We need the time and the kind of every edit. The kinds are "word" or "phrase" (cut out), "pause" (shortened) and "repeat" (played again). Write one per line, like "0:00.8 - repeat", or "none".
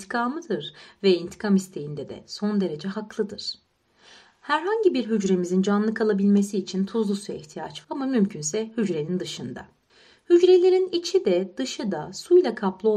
0:07.8 - word